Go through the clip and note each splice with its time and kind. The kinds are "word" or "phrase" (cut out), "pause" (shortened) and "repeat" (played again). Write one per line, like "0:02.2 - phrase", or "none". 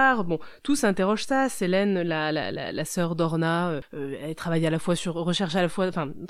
none